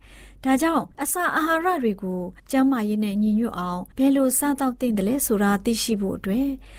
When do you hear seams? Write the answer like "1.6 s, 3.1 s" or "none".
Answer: 0.9 s, 2.4 s, 3.9 s